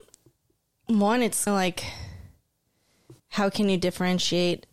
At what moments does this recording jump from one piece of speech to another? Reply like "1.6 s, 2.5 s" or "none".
1.5 s, 3.2 s